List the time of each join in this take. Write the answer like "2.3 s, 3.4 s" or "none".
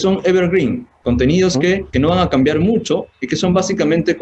none